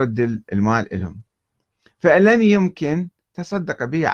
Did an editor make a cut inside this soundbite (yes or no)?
no